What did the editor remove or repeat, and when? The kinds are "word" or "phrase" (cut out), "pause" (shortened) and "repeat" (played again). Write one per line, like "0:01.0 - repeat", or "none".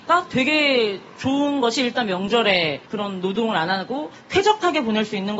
0:02.9 - pause